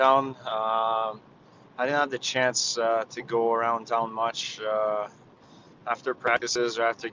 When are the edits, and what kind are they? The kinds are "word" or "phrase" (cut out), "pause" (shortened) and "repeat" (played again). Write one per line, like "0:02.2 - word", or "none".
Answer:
none